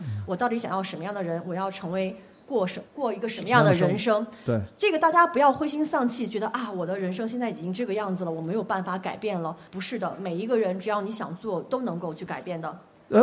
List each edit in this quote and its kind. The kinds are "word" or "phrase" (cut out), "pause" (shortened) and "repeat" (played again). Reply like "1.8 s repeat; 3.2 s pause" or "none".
2.9 s pause; 9.7 s pause